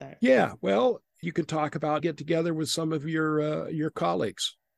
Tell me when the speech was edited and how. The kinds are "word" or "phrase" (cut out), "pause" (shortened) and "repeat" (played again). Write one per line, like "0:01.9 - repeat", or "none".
0:01.2 - phrase
0:02.0 - phrase